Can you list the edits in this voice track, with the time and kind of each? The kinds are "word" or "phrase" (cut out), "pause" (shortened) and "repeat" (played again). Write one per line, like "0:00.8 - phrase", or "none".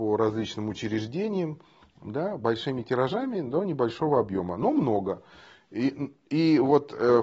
none